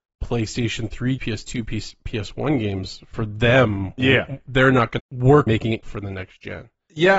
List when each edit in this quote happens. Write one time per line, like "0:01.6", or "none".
0:01.2
0:05.0
0:05.5
0:05.8